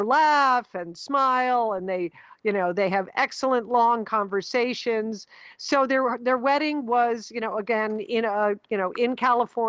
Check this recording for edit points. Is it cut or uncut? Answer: uncut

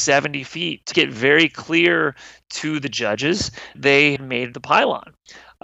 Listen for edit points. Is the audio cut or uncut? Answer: cut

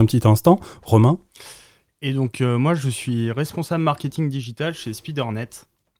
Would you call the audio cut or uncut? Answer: uncut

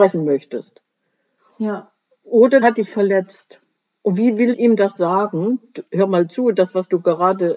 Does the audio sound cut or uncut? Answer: cut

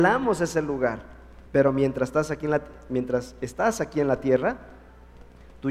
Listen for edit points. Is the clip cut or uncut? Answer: cut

